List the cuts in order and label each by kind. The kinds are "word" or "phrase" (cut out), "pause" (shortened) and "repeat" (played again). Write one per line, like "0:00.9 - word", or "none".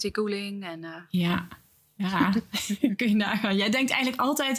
none